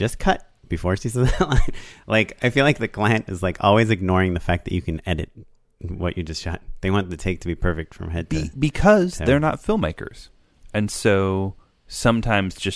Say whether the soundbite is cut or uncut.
uncut